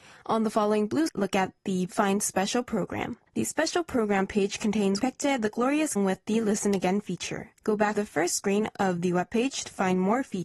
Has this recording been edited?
yes; 7 cuts; at 1.1 s, 1.9 s, 3.3 s, 5.0 s, 6.0 s, 7.6 s, 7.9 s

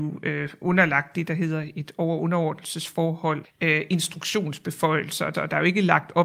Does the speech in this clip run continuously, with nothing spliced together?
no; 2 cuts; at 3.4 s, 5.3 s

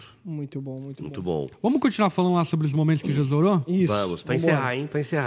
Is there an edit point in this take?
no; 0 cuts

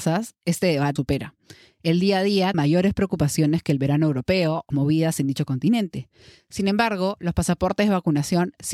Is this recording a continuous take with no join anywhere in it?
no; 3 cuts; at 1.0 s, 2.5 s, 4.7 s

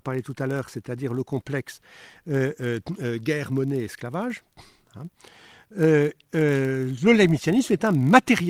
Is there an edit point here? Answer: no; 0 cuts

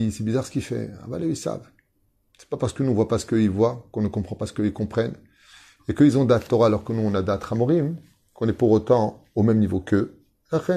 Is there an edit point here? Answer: no; 0 cuts

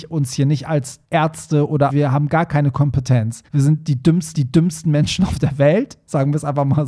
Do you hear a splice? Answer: yes; 4 cuts; at 1.0 s, 1.9 s, 3.5 s, 4.3 s

